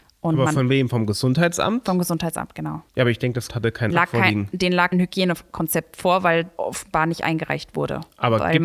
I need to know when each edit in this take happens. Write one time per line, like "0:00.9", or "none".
0:02.9
0:03.5
0:03.9
0:04.9
0:06.6